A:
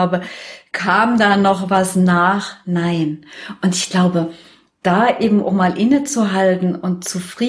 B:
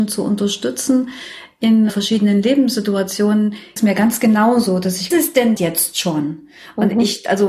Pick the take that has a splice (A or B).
B